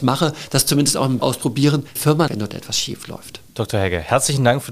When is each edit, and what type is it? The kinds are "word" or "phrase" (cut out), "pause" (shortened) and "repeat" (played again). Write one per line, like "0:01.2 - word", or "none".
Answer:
0:01.2 - word
0:02.0 - phrase
0:02.3 - word
0:03.5 - pause